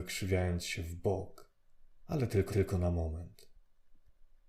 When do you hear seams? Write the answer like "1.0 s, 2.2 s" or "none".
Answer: 2.5 s

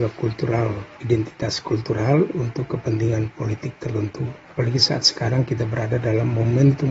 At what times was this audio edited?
1.0 s

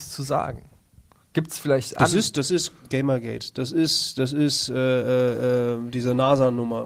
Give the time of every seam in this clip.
1.9 s

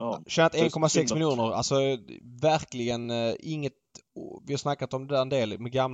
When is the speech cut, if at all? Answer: none

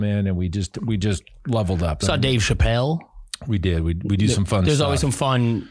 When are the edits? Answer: none

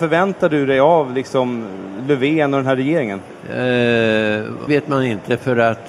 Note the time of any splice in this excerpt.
4.7 s

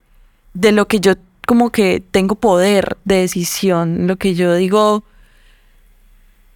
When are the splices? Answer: none

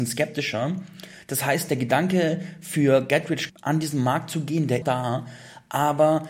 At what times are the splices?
3.5 s, 4.8 s

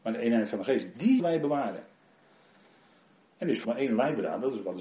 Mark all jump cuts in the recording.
1.2 s, 3.6 s

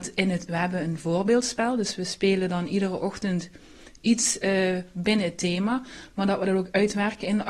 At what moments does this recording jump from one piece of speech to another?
none

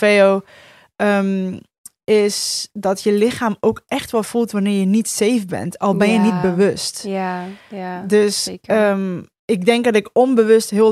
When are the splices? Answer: none

